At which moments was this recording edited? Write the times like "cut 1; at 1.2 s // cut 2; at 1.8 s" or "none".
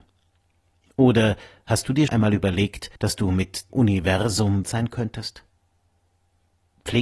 cut 1; at 2.1 s // cut 2; at 3.0 s // cut 3; at 3.7 s // cut 4; at 4.6 s